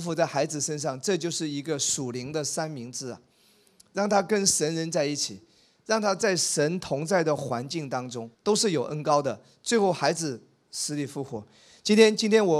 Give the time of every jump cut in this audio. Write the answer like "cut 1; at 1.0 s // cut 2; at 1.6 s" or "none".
cut 1; at 8.3 s